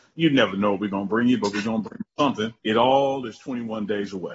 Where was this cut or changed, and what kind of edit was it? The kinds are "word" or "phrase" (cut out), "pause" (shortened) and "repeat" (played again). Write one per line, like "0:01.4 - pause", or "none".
0:02.6 - pause